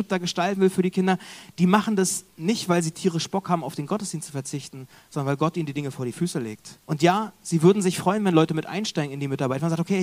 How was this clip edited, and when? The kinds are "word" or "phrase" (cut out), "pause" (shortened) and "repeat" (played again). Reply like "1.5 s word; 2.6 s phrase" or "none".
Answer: 2.3 s pause; 6.8 s pause